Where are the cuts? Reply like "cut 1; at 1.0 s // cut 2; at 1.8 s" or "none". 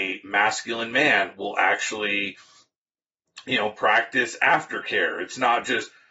none